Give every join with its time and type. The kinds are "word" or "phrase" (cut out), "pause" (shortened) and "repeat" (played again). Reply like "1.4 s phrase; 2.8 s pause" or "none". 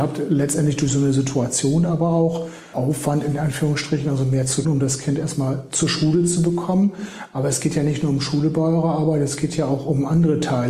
2.7 s word; 4.6 s word

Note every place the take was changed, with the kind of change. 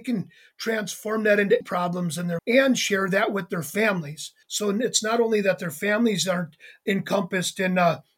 1.6 s word; 2.4 s word; 4.4 s pause

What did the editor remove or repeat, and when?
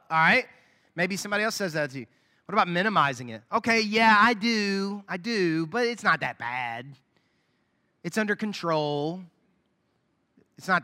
none

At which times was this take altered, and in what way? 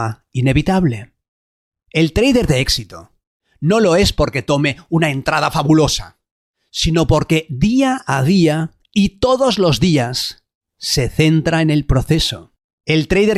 none

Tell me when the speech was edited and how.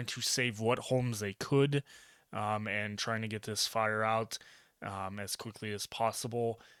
none

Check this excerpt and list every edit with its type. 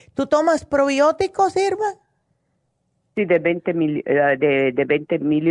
none

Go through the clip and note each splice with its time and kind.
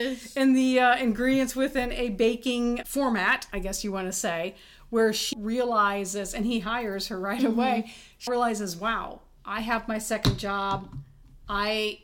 5.3 s word; 8.3 s word

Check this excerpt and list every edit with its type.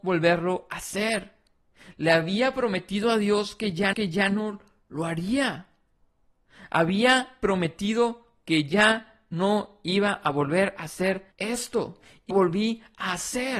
3.9 s repeat; 11.3 s pause; 12.3 s word

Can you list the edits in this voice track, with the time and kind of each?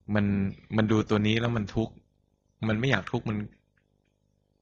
none

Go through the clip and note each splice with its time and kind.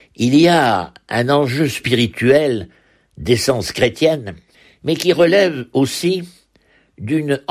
4.5 s pause

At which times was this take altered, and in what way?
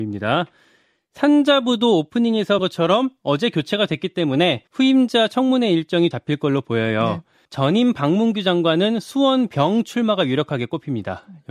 2.6 s word; 4.7 s pause; 6.1 s word; 7.4 s pause

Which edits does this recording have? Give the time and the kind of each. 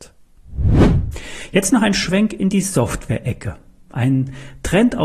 none

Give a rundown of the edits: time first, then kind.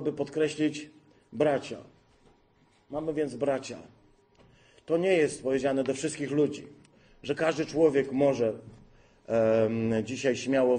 none

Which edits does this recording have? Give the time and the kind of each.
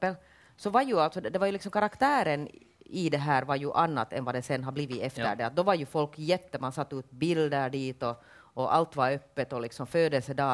none

